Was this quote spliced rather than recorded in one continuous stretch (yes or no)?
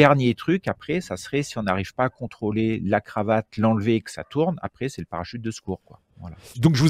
no